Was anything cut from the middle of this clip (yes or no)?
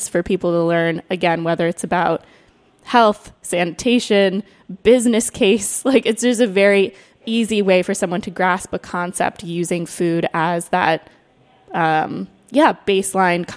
no